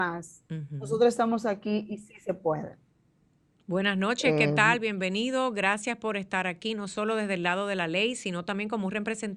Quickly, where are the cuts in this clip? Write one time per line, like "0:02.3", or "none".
none

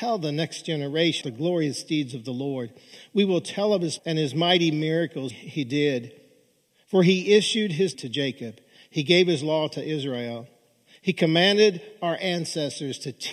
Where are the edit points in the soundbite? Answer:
0:01.2
0:04.0
0:05.3
0:07.9

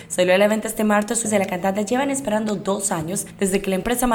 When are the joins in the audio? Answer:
0:01.2

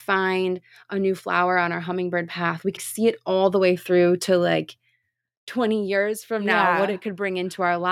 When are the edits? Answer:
0:02.8

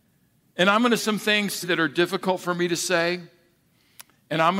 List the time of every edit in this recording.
0:01.0
0:01.6

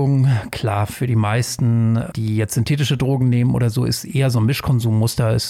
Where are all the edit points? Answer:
0:02.1

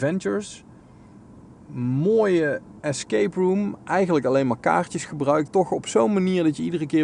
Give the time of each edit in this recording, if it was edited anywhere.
0:05.5

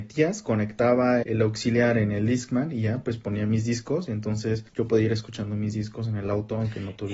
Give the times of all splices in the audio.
0:01.2
0:04.7

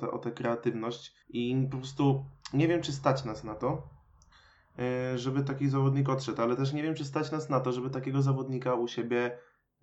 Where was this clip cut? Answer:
0:01.2

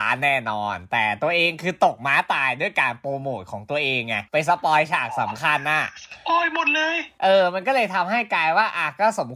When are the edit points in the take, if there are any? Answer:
0:04.3

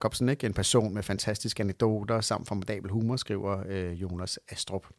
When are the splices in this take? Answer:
none

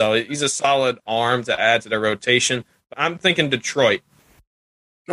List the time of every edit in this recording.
0:02.9

